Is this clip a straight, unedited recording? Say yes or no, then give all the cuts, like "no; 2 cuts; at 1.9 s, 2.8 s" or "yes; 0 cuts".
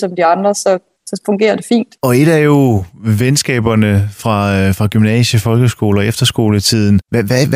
no; 1 cut; at 2.0 s